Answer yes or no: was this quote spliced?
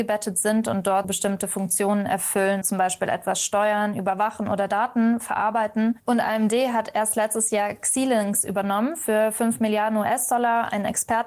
yes